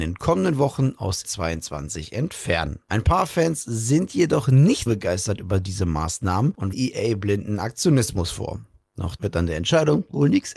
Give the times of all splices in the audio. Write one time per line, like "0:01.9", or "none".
0:01.2
0:04.9
0:06.7
0:09.2